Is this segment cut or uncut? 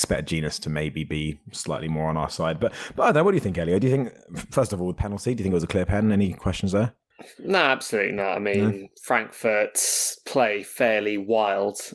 uncut